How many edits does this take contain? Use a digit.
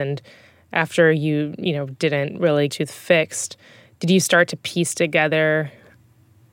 1